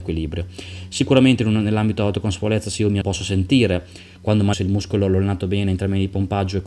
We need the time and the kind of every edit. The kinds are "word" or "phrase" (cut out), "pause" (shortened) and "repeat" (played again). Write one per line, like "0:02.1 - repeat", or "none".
0:03.0 - word
0:04.5 - word